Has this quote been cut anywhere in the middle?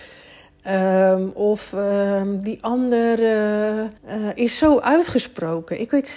yes; 1 cut; at 4.0 s

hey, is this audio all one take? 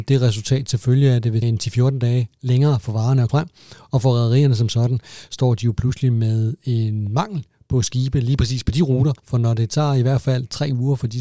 no; 3 cuts; at 1.4 s, 3.3 s, 9.2 s

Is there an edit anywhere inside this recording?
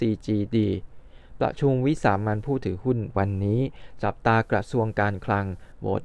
yes; 1 cut; at 3.1 s

